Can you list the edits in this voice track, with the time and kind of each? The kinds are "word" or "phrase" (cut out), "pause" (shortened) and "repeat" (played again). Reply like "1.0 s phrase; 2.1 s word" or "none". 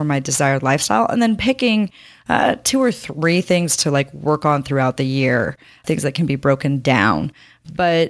none